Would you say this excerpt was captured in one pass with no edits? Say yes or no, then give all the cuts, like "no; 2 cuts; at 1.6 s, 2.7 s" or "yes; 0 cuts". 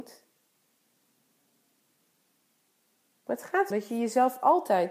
no; 1 cut; at 3.7 s